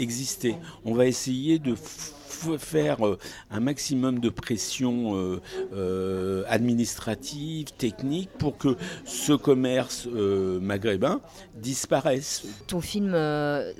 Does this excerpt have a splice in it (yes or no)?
no